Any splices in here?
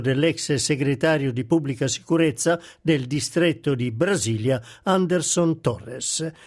no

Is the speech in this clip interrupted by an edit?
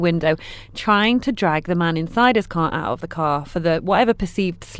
no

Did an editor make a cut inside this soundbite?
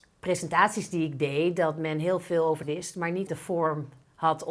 yes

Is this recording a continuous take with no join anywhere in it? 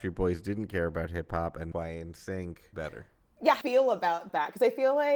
no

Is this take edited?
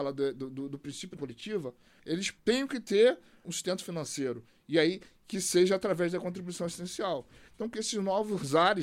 yes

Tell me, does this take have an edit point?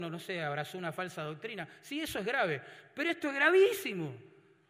no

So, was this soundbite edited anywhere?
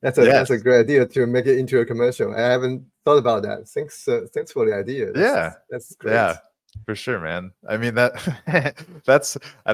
no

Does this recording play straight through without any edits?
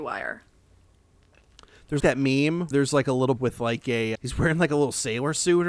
no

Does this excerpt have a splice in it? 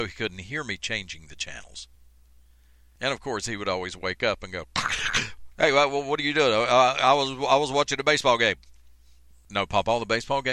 no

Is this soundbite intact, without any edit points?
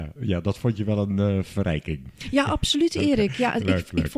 yes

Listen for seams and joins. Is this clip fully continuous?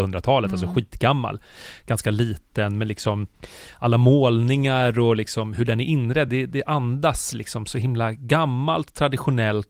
yes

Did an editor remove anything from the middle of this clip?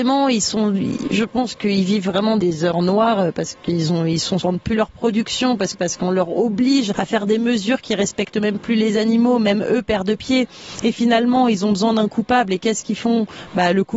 yes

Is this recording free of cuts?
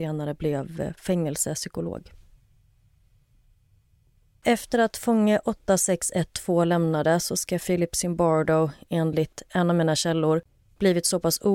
yes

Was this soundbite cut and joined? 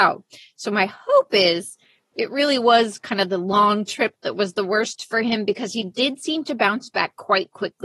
no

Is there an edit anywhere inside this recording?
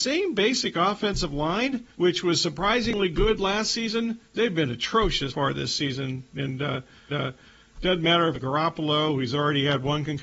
yes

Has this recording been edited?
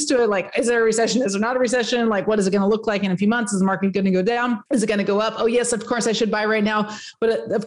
yes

